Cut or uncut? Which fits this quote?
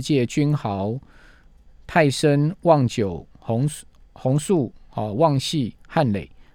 uncut